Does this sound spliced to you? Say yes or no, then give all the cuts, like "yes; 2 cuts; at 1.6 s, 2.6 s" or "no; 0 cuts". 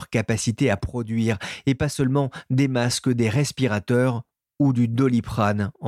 no; 0 cuts